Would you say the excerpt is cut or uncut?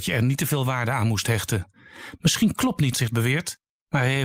cut